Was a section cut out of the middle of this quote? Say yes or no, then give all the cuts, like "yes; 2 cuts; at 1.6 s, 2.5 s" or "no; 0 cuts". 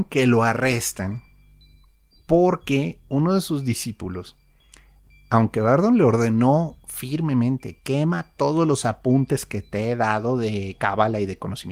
no; 0 cuts